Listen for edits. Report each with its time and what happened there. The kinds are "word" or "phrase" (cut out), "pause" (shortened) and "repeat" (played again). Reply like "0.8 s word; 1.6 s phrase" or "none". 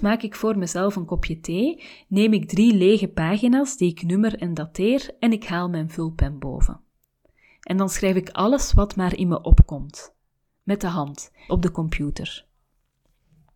11.5 s word

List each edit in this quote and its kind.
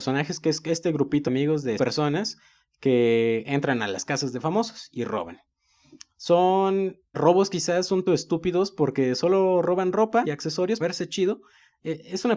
1.3 s word; 1.8 s word; 7.1 s word; 8.1 s word; 10.2 s word; 10.8 s word

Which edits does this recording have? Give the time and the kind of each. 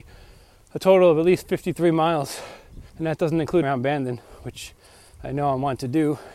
2.9 s pause; 3.6 s word

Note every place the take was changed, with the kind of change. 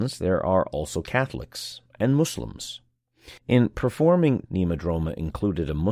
3.4 s pause; 4.5 s phrase

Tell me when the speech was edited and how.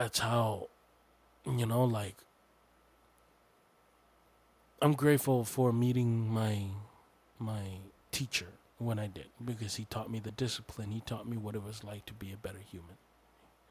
9.3 s pause

